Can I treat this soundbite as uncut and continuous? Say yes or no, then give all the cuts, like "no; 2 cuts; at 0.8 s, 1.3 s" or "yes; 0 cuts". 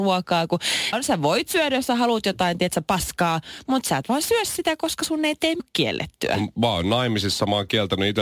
no; 2 cuts; at 0.9 s, 5.6 s